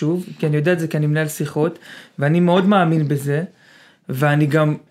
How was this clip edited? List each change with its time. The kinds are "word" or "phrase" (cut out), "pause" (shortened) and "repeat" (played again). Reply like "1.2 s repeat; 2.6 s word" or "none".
none